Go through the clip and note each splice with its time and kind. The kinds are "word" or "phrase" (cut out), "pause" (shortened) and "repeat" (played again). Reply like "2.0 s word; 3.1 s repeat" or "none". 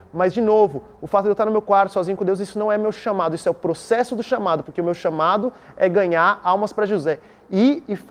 none